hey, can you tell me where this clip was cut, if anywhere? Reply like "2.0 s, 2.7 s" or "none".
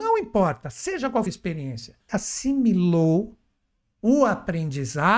1.3 s, 2.1 s